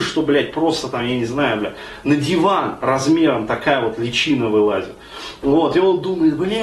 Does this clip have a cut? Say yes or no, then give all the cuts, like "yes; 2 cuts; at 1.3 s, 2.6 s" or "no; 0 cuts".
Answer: no; 0 cuts